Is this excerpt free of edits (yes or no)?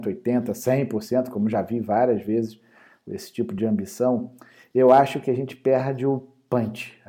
yes